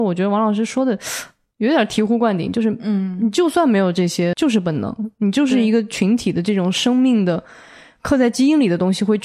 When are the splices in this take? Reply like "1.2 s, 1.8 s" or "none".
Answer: 4.3 s

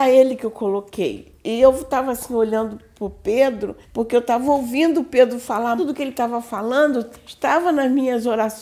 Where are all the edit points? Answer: 3.8 s, 5.8 s

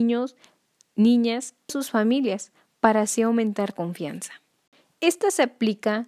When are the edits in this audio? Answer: 1.7 s, 3.7 s

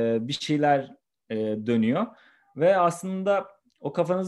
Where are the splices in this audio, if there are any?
none

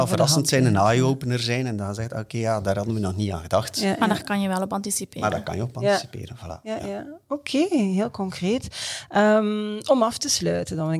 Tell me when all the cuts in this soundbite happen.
none

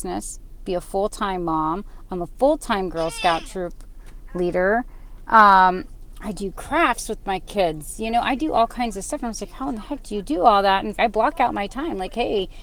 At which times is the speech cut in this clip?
10.9 s

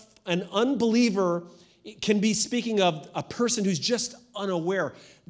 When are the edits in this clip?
none

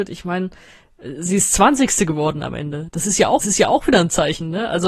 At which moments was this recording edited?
3.4 s

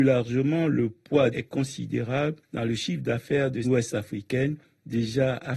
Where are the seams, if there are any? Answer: 1.3 s, 3.6 s

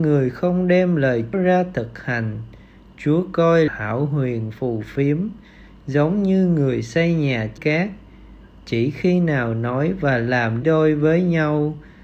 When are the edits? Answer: 1.3 s, 3.7 s, 7.6 s, 10.6 s

